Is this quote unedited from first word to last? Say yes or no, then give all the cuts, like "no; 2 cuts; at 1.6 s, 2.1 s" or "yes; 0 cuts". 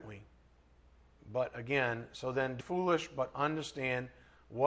no; 1 cut; at 2.6 s